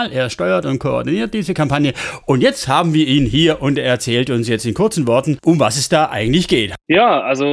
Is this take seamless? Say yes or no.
yes